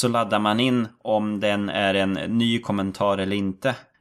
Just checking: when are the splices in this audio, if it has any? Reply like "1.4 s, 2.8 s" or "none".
none